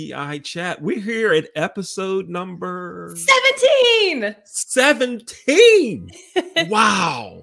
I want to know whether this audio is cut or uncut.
uncut